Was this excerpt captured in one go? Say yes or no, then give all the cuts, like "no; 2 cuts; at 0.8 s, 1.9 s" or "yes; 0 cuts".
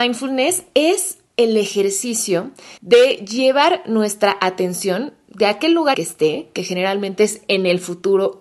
no; 2 cuts; at 2.8 s, 5.9 s